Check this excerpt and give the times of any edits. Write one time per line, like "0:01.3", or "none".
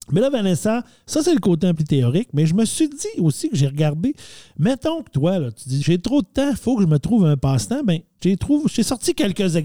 0:01.7
0:05.8
0:08.2